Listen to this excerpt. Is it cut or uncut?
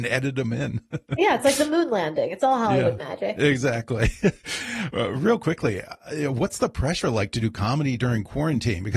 uncut